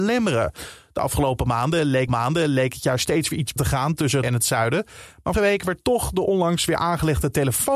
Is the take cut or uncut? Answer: cut